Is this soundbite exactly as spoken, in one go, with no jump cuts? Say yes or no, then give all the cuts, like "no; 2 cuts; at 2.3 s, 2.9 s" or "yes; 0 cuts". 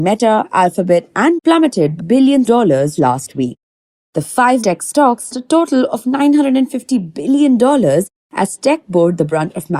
no; 6 cuts; at 1.4 s, 2.0 s, 2.5 s, 3.0 s, 4.6 s, 5.3 s